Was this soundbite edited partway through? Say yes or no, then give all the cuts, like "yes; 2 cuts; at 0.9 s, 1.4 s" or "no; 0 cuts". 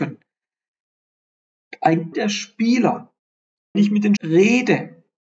yes; 3 cuts; at 2.1 s, 3.7 s, 4.2 s